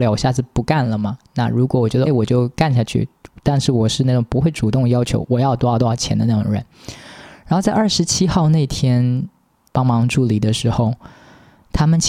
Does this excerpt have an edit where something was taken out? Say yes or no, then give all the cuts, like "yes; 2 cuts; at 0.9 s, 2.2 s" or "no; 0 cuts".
yes; 2 cuts; at 2.1 s, 9.7 s